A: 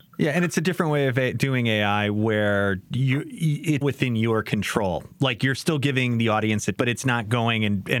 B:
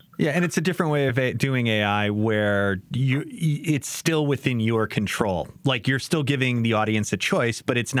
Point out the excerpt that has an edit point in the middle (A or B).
A